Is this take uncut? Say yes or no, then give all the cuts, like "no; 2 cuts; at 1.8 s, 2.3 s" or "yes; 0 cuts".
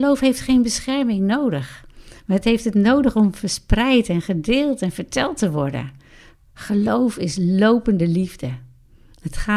yes; 0 cuts